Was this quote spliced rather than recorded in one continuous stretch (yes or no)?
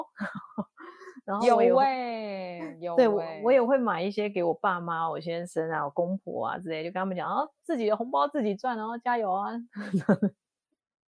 no